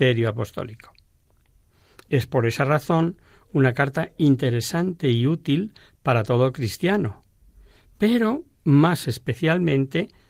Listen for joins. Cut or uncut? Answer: uncut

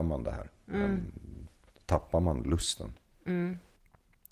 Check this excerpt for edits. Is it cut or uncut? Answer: cut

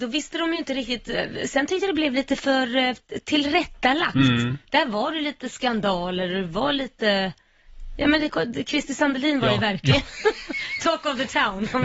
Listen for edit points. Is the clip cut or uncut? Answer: uncut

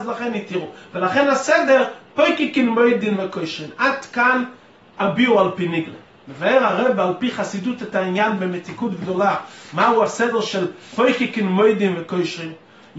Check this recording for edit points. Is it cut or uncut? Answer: uncut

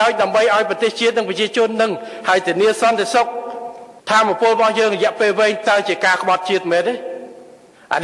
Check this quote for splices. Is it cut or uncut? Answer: cut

